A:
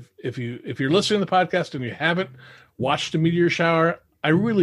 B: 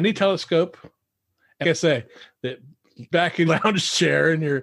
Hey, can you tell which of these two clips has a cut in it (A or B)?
B